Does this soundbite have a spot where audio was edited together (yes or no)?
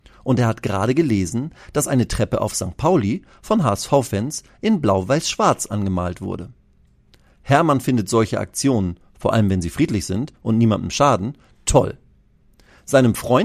no